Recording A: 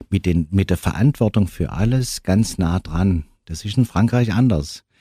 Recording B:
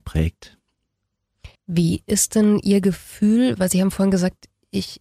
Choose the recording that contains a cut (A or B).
B